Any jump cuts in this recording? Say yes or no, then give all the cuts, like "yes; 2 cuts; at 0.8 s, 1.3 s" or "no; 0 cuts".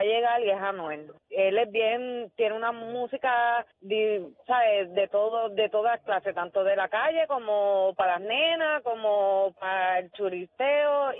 yes; 2 cuts; at 1.2 s, 3.7 s